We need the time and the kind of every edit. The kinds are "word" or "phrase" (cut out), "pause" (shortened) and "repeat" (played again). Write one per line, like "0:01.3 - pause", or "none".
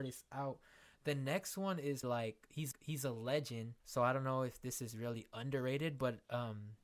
0:02.0 - word
0:02.7 - repeat
0:03.8 - pause

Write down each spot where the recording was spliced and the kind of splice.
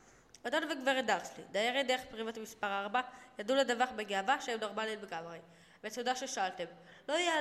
none

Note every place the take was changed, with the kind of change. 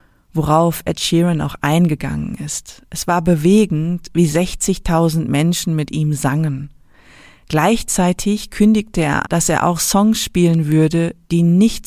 0:09.2 - word

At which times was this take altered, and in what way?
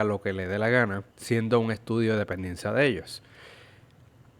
0:01.1 - pause

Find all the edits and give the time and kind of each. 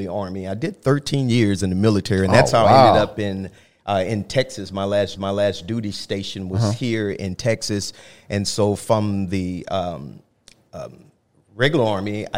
0:05.2 - repeat

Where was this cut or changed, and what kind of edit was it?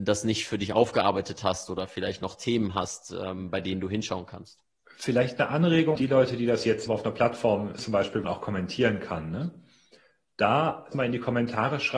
0:06.0 - word
0:06.9 - word
0:07.8 - word
0:08.2 - word
0:10.9 - word

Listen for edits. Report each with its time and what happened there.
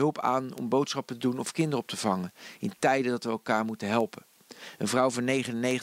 none

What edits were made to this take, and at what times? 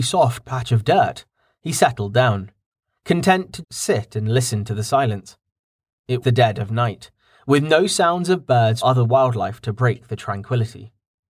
0:03.6 - word
0:06.2 - word
0:08.8 - word

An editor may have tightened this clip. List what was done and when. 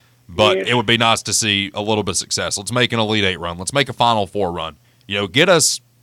none

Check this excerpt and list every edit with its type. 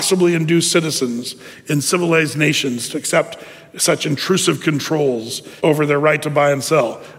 0:05.6 - pause

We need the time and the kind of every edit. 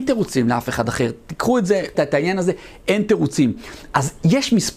0:01.9 - word

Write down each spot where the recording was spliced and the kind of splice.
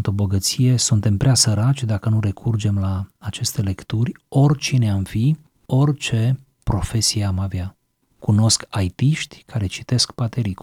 none

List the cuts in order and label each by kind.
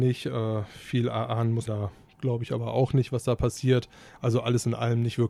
0:01.7 - word

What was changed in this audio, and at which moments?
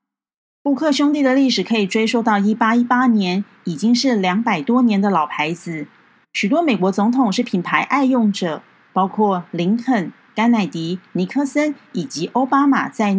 none

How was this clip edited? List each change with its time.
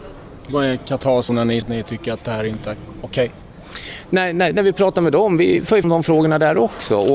0:01.3 - word
0:01.6 - word
0:05.8 - word

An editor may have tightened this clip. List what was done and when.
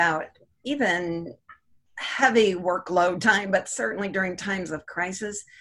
none

